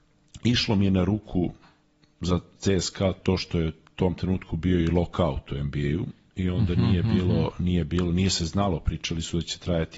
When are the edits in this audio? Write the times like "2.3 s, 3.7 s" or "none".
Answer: none